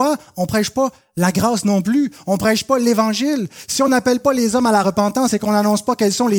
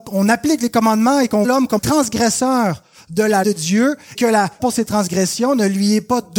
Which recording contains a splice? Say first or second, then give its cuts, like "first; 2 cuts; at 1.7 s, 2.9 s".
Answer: second; 5 cuts; at 1.4 s, 1.8 s, 3.4 s, 4.1 s, 4.6 s